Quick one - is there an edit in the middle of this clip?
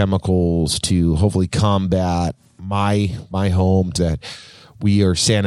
yes; 1 cut; at 4.0 s

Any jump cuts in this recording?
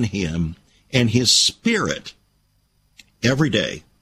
no; 0 cuts

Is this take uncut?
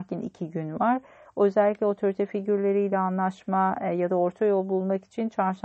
yes; 0 cuts

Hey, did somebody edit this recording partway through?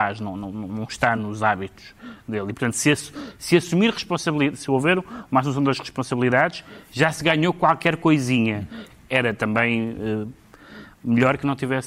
no; 0 cuts

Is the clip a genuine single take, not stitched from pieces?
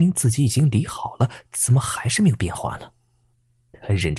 yes; 0 cuts

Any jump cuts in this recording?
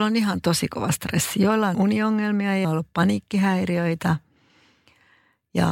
yes; 2 cuts; at 1.7 s, 2.6 s

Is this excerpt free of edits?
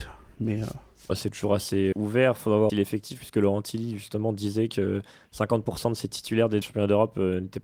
no; 3 cuts; at 1.9 s, 2.7 s, 6.6 s

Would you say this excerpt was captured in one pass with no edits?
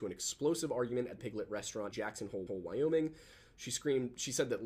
no; 3 cuts; at 1.2 s, 1.9 s, 2.5 s

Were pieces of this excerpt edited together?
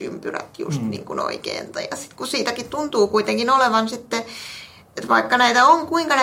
no; 0 cuts

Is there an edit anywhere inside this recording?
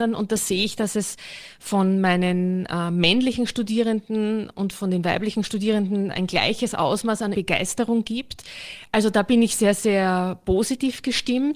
yes; 1 cut; at 7.3 s

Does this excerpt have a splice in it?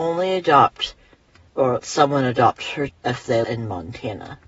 yes; 3 cuts; at 1.8 s, 2.9 s, 3.4 s

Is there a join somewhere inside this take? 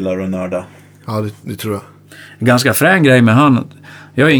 no; 0 cuts

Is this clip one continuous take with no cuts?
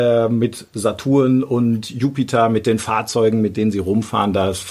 yes; 0 cuts

